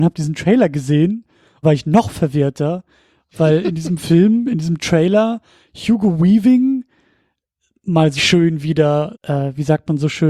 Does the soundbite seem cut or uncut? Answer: cut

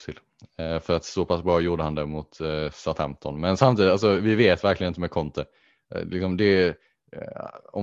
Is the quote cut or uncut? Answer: uncut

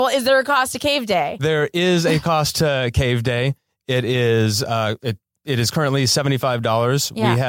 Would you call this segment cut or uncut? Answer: uncut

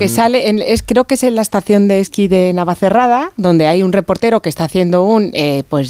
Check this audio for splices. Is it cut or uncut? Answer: uncut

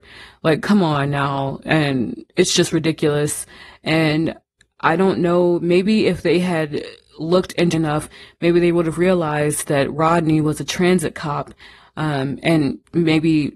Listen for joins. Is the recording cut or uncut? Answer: cut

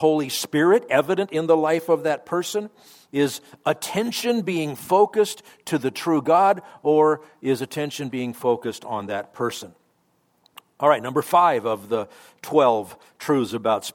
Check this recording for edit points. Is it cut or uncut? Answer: uncut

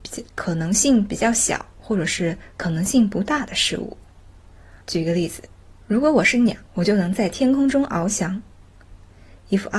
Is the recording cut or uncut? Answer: cut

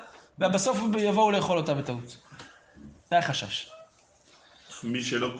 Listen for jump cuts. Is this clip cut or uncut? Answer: cut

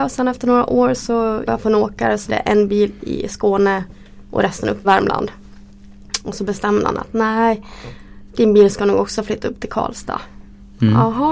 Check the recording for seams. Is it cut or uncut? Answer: cut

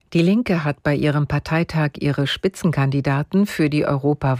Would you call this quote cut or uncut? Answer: uncut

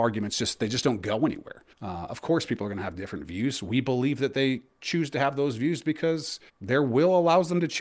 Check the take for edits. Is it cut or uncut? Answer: cut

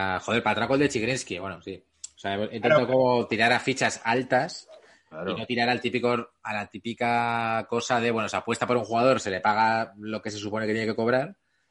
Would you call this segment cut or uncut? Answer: uncut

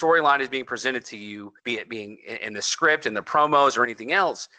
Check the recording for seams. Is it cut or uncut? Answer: cut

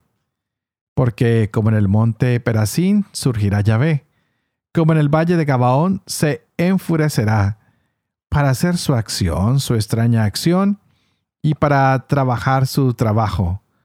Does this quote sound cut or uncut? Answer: uncut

